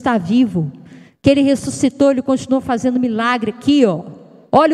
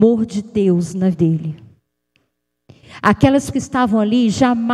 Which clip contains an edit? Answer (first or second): second